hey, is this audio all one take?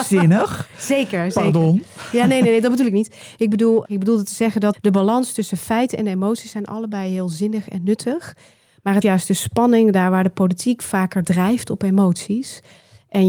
no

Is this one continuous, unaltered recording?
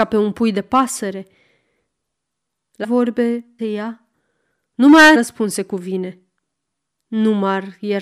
no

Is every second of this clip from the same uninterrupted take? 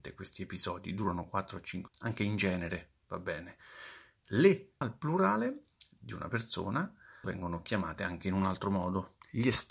no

